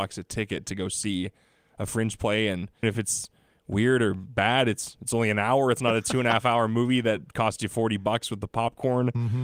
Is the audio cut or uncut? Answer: cut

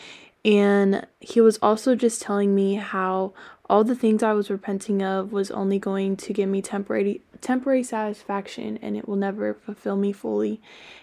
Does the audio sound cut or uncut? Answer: uncut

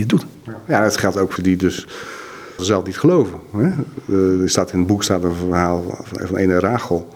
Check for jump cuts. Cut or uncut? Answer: cut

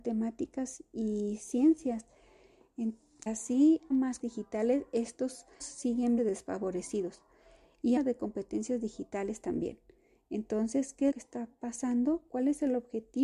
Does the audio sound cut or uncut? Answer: cut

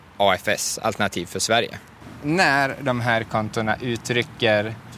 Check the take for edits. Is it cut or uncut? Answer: cut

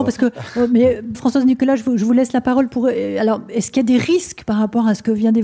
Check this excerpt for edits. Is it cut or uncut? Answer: cut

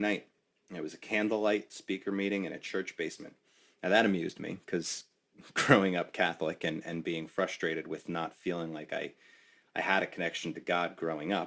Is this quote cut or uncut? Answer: uncut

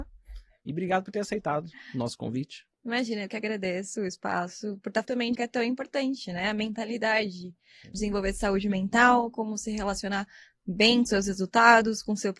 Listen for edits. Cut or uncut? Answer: cut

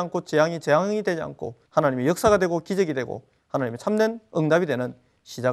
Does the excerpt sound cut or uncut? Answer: cut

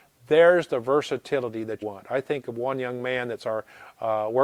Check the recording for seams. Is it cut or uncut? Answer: cut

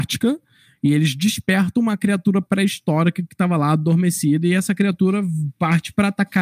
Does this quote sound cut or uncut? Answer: uncut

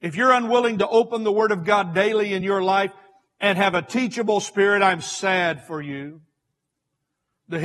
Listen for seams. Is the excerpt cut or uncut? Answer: uncut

